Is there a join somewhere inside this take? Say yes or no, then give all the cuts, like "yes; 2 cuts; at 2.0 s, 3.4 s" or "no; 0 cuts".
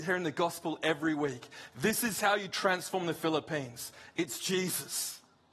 no; 0 cuts